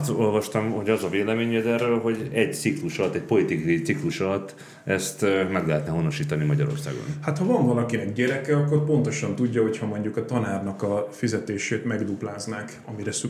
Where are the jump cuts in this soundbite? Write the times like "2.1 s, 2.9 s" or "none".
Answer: none